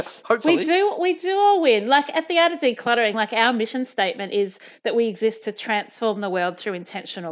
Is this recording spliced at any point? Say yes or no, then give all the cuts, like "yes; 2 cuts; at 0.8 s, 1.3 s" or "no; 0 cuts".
no; 0 cuts